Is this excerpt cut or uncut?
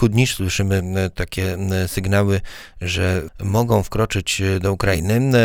cut